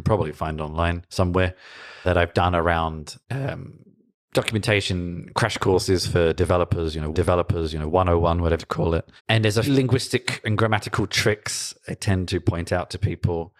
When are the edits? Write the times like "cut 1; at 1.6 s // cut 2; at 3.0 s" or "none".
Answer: cut 1; at 2.0 s // cut 2; at 3.2 s // cut 3; at 7.1 s // cut 4; at 8.6 s // cut 5; at 9.2 s // cut 6; at 9.7 s